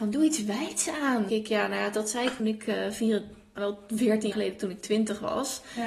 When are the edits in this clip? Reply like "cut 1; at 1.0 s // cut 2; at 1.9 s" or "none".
cut 1; at 1.3 s // cut 2; at 2.4 s // cut 3; at 3.6 s // cut 4; at 4.3 s